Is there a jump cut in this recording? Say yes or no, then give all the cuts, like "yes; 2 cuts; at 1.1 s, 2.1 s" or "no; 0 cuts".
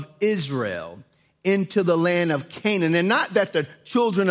no; 0 cuts